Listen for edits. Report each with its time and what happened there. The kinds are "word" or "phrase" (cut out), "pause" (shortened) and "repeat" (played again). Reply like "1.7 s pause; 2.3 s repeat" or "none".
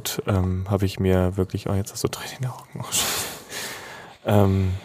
none